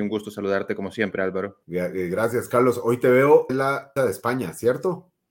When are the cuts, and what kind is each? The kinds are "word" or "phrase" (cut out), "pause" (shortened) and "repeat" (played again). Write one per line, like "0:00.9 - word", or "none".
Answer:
0:01.6 - pause
0:03.5 - word
0:04.0 - word